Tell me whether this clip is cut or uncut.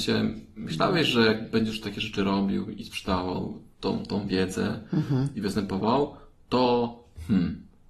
uncut